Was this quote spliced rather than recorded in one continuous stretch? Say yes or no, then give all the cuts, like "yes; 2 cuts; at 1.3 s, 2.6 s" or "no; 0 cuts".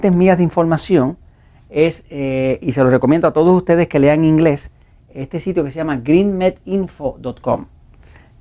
no; 0 cuts